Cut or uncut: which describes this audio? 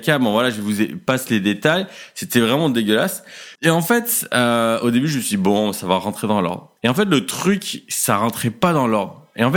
cut